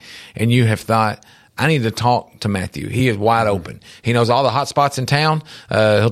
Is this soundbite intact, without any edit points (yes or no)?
yes